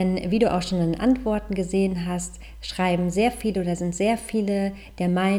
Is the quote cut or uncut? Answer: uncut